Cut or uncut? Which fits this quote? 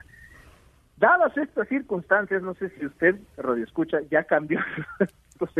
uncut